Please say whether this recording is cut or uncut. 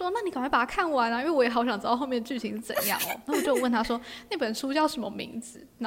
uncut